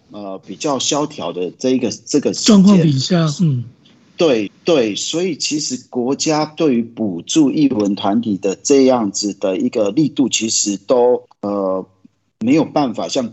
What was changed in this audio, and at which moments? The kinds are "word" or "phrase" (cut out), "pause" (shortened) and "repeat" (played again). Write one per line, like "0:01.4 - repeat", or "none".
0:04.5 - repeat
0:11.3 - pause

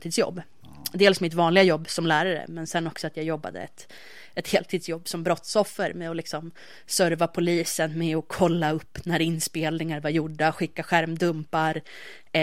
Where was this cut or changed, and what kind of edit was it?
none

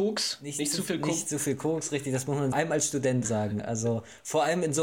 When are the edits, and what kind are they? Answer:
0:02.5 - phrase
0:03.2 - word

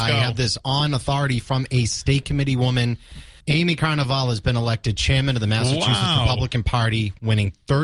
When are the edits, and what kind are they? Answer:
0:03.4 - pause

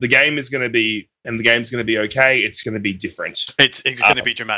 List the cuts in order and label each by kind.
0:01.2 - word
0:02.6 - word

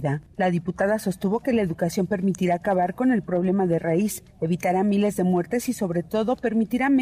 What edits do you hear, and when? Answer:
none

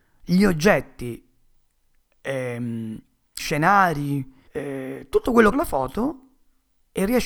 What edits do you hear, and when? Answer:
0:03.4 - word
0:04.5 - pause
0:05.5 - phrase

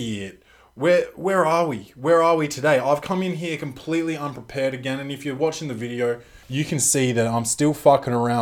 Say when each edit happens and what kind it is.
0:06.4 - pause

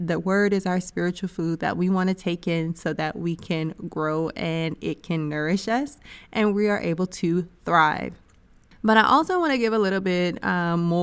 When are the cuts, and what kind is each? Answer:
none

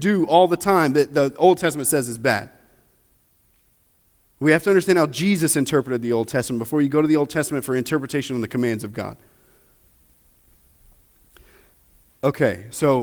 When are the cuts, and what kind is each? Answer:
none

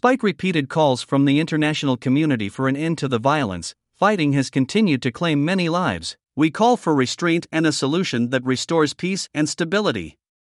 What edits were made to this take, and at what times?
0:06.2 - pause

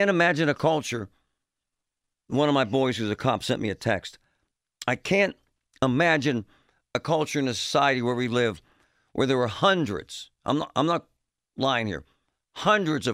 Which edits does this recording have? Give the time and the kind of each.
none

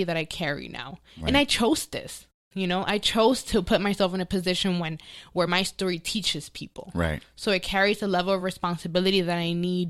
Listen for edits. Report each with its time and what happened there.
none

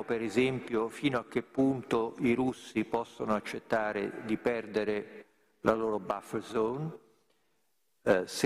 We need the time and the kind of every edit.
none

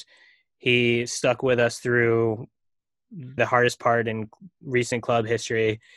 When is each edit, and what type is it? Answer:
0:03.4 - word

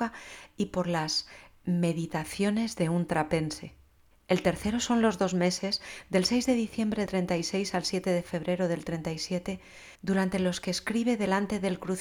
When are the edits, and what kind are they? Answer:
0:04.1 - pause
0:07.1 - word
0:09.9 - pause

